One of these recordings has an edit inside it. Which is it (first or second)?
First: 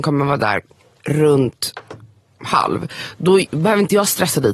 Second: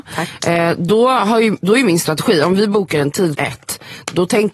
second